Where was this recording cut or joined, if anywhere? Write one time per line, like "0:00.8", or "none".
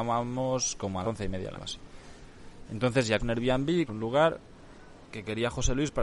0:01.0
0:01.5
0:03.2
0:03.9
0:05.1